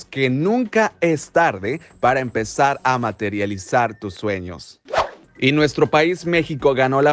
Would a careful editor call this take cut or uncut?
uncut